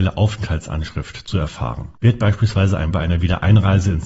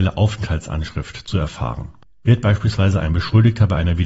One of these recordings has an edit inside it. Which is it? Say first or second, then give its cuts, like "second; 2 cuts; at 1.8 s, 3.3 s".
first; 2 cuts; at 2.0 s, 2.9 s